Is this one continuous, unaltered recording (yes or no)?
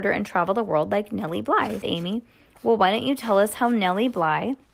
no